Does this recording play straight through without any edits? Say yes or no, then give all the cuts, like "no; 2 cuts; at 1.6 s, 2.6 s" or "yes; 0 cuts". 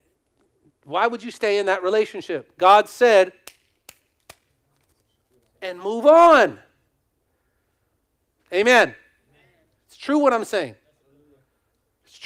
yes; 0 cuts